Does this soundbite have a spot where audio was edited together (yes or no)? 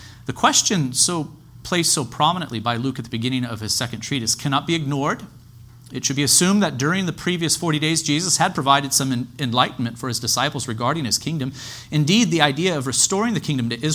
no